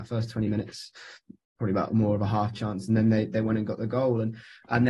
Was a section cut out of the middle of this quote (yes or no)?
no